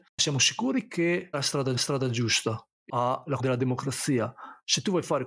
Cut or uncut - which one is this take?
cut